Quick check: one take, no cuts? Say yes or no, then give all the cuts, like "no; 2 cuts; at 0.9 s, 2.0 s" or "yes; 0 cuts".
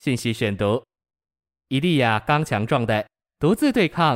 yes; 0 cuts